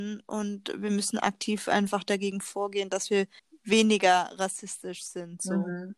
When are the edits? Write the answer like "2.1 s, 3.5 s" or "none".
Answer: 3.4 s